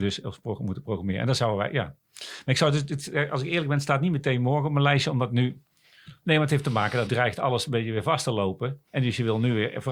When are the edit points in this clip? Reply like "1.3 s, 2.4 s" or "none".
7.1 s, 8.9 s